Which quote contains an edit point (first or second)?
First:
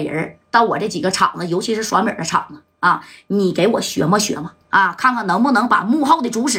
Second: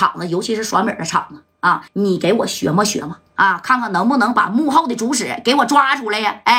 second